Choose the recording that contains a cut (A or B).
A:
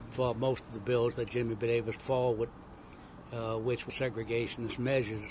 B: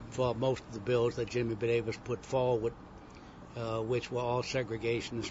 A